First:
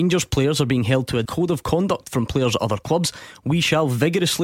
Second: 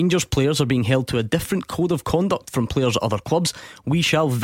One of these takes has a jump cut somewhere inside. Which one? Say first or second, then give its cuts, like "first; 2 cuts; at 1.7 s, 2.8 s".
first; 1 cut; at 1.3 s